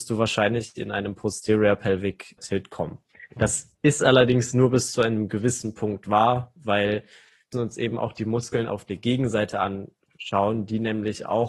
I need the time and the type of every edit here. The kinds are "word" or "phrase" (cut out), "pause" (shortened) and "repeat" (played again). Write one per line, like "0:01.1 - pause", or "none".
0:02.4 - word
0:03.7 - pause
0:07.5 - word